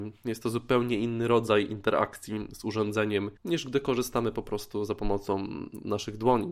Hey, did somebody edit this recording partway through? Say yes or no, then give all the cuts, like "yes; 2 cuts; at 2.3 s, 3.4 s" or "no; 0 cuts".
yes; 1 cut; at 3.4 s